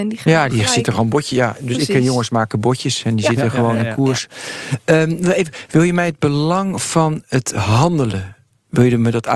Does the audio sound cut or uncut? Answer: uncut